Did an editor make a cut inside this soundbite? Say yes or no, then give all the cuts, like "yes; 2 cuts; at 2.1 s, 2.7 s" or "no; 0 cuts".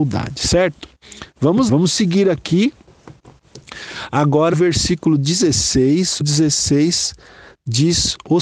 yes; 3 cuts; at 1.7 s, 4.5 s, 6.2 s